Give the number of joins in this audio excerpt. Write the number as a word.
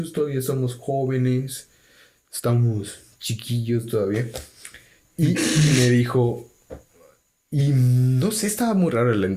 zero